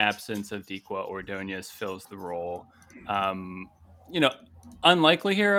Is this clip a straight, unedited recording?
yes; 0 cuts

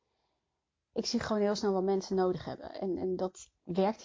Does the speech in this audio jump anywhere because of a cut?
no; 0 cuts

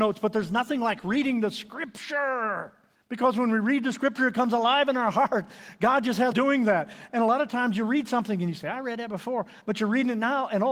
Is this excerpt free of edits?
no; 2 cuts; at 2.9 s, 6.3 s

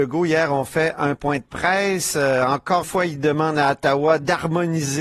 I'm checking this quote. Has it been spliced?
yes; 1 cut; at 2.8 s

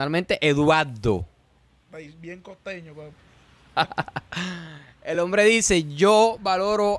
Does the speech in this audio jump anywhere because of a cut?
no; 0 cuts

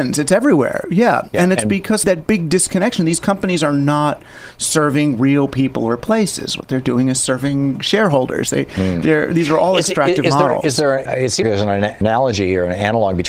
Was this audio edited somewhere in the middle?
yes; 2 cuts; at 2.0 s, 11.4 s

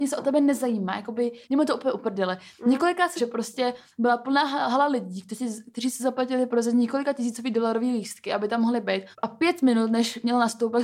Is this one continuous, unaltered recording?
no; 3 cuts; at 1.4 s, 3.2 s, 9.1 s

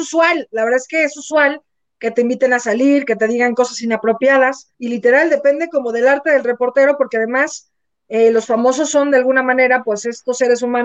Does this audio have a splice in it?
yes; 1 cut; at 4.7 s

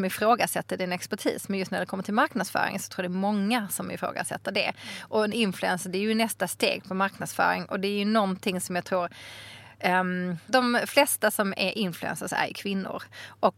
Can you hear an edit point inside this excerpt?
no; 0 cuts

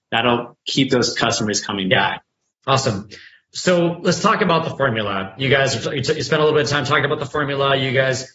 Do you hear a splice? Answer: no; 0 cuts

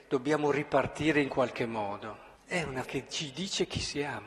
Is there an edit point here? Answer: yes; 3 cuts; at 1.3 s, 2.3 s, 2.8 s

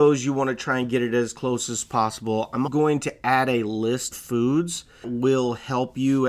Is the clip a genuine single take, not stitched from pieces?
no; 3 cuts; at 2.7 s, 4.1 s, 5.0 s

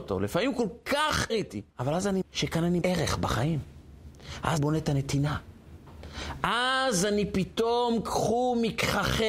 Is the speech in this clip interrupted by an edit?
yes; 5 cuts; at 1.3 s, 1.7 s, 2.2 s, 2.8 s, 4.6 s

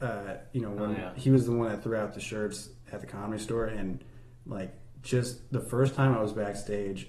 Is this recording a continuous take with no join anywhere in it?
yes; 0 cuts

